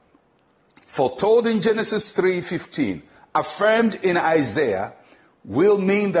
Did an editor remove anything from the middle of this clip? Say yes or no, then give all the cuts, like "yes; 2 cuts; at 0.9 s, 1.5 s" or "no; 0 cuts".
no; 0 cuts